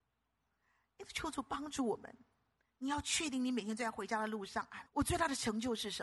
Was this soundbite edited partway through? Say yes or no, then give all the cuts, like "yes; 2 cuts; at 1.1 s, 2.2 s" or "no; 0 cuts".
yes; 1 cut; at 4.9 s